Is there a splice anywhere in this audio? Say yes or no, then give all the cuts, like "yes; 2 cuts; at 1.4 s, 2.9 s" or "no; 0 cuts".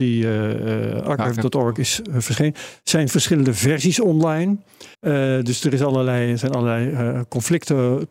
yes; 1 cut; at 4.9 s